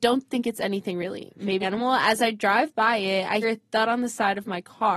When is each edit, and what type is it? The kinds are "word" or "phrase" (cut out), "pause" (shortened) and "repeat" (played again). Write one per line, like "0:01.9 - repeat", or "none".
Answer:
0:01.6 - word
0:03.4 - word